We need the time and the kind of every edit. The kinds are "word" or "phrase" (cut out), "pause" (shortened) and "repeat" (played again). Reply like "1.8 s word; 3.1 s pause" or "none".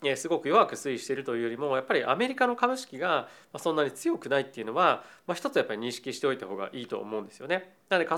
none